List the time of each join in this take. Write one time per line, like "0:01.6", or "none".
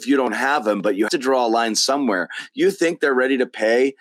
0:01.1